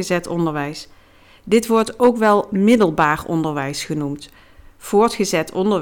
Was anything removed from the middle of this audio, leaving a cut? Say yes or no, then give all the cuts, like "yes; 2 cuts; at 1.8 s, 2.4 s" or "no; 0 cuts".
no; 0 cuts